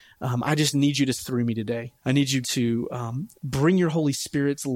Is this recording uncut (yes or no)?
no